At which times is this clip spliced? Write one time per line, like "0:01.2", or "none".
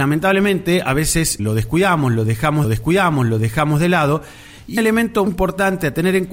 0:01.4
0:02.6
0:04.8
0:05.3